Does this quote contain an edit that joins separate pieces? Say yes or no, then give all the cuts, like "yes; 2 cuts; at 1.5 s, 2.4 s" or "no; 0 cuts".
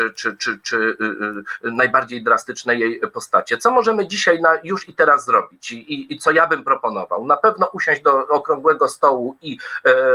no; 0 cuts